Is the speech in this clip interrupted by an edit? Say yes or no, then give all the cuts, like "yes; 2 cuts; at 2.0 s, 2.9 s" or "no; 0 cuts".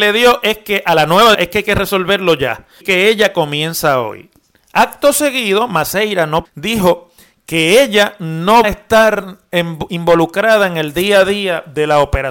yes; 4 cuts; at 1.3 s, 2.8 s, 6.4 s, 8.6 s